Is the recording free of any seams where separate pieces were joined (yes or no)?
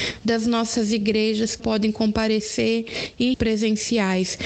no